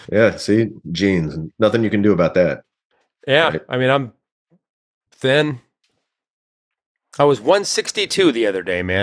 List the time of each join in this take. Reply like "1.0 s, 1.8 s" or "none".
none